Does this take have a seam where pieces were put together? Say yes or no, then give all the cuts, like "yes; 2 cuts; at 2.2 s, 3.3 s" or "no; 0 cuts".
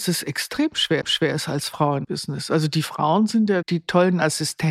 yes; 3 cuts; at 1.0 s, 2.0 s, 3.6 s